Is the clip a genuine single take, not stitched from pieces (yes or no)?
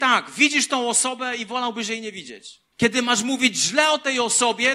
no